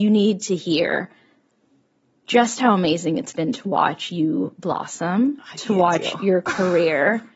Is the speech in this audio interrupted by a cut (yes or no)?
no